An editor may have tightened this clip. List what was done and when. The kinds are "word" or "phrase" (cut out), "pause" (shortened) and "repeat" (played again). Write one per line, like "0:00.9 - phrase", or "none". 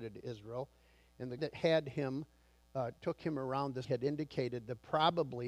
0:01.4 - word
0:03.0 - pause
0:03.8 - word